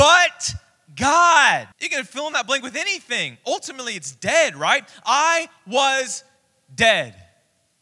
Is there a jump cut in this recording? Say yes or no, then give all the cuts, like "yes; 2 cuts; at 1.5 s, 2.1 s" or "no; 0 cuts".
yes; 1 cut; at 1.7 s